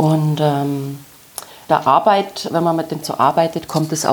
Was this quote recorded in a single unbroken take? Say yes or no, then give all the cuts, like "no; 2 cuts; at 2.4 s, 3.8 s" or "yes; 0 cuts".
no; 2 cuts; at 1.7 s, 3.0 s